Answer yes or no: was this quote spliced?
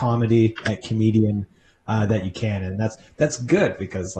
no